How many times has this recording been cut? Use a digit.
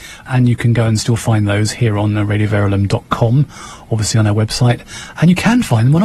0